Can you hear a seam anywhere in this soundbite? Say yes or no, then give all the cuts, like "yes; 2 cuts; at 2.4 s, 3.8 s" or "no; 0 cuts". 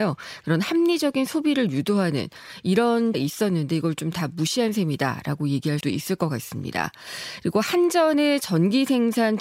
yes; 2 cuts; at 3.1 s, 5.8 s